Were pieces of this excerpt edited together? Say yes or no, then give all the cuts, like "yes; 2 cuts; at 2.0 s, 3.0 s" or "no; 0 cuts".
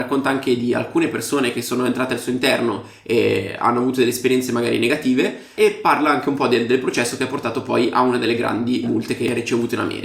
no; 0 cuts